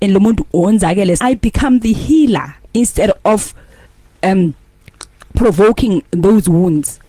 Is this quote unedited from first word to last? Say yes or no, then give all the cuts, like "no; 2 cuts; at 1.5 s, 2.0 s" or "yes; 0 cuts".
no; 2 cuts; at 1.2 s, 2.6 s